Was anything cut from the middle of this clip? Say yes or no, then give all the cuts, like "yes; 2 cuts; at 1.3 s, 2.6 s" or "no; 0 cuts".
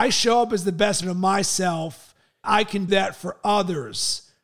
yes; 3 cuts; at 1.0 s, 2.4 s, 2.9 s